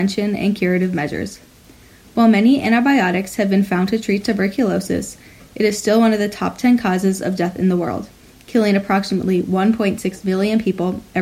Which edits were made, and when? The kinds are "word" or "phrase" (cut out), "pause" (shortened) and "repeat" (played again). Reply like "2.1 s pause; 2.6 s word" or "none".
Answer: none